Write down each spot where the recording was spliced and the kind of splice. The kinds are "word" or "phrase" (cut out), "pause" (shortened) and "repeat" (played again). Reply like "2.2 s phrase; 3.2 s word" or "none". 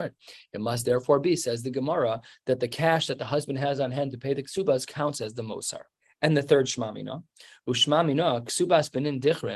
6.0 s pause